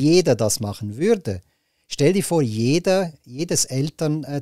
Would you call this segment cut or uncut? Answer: uncut